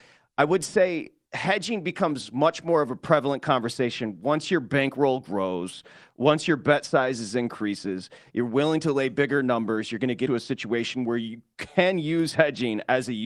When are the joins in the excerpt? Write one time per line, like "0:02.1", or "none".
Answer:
0:10.3